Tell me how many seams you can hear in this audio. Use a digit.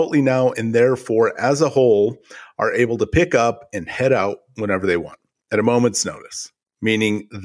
0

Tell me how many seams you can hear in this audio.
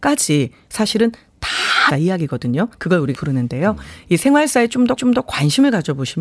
4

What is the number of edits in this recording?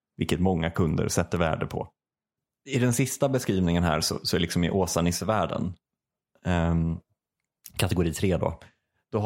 0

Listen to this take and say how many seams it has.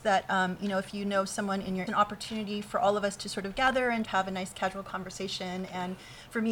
2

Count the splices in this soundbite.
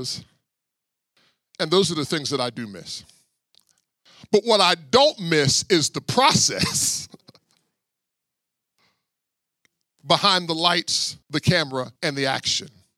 2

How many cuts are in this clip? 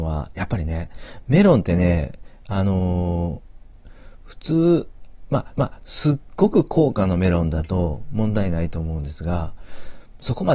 1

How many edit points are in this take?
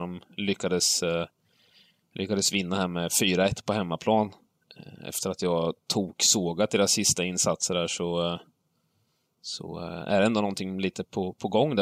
0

